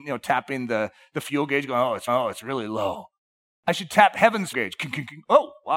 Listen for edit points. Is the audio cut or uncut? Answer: cut